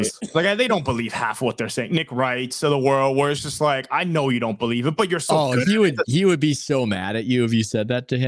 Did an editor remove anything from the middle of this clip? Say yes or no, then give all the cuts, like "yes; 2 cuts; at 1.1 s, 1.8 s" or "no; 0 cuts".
no; 0 cuts